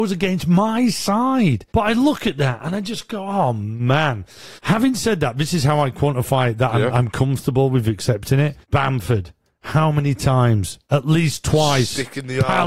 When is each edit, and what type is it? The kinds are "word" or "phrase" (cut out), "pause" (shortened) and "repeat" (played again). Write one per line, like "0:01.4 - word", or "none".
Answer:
0:01.7 - pause
0:04.6 - pause
0:08.6 - pause
0:10.8 - pause